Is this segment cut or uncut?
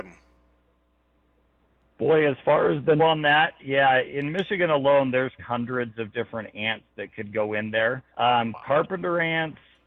cut